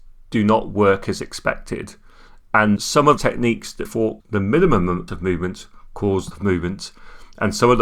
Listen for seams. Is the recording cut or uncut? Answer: cut